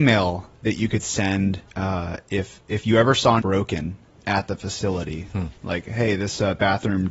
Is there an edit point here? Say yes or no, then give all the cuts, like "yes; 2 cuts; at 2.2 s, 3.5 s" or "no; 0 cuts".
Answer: yes; 3 cuts; at 1.7 s, 3.4 s, 5.6 s